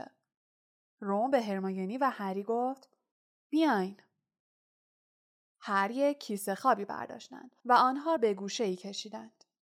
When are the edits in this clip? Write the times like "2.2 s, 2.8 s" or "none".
7.6 s, 8.2 s